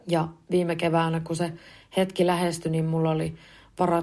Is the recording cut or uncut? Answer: uncut